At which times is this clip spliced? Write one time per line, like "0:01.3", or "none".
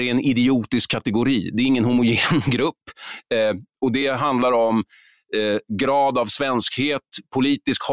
none